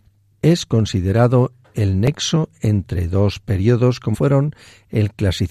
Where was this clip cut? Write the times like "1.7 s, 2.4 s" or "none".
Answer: 4.1 s